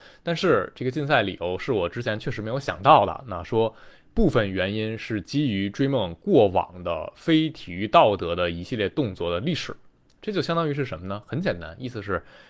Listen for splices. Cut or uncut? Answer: uncut